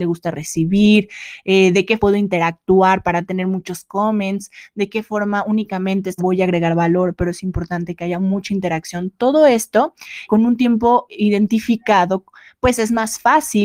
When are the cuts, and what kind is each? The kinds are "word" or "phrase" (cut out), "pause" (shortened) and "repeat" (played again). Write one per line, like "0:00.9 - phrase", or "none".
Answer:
0:02.0 - word
0:06.2 - word
0:10.3 - word
0:11.1 - word

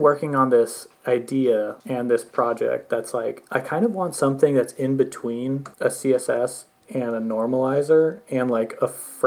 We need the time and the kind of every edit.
0:01.8 - pause
0:05.7 - pause

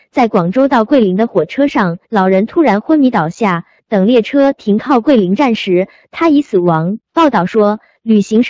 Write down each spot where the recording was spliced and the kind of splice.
0:02.0 - pause
0:07.0 - pause

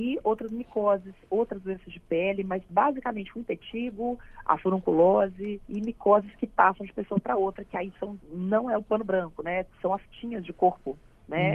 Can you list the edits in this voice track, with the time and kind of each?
0:05.6 - pause
0:08.2 - pause
0:09.7 - pause

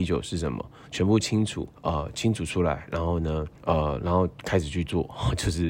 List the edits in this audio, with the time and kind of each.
0:01.8 - pause
0:03.6 - pause

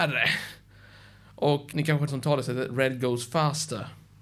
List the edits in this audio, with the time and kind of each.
0:01.7 - word
0:02.1 - word

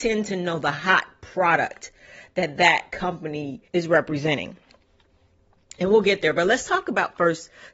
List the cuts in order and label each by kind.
0:03.7 - pause

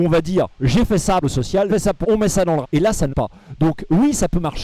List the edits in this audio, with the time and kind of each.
0:01.2 - word
0:01.7 - word
0:02.0 - word
0:02.6 - word
0:03.1 - word

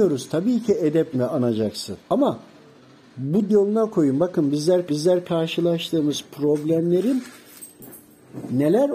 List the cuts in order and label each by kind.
0:01.1 - word
0:02.0 - pause
0:03.5 - word
0:04.9 - repeat

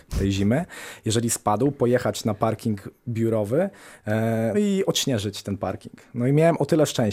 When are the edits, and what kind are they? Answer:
0:04.5 - word

